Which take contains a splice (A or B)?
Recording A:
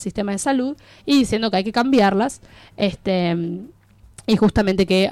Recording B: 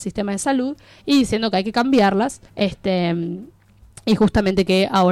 B